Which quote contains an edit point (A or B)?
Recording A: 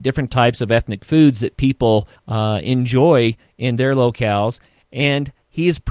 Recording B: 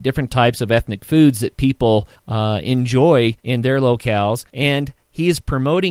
B